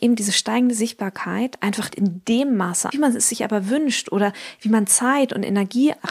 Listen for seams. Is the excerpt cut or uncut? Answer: cut